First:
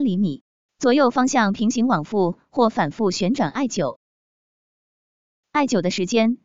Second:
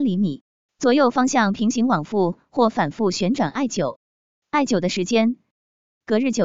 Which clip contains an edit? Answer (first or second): second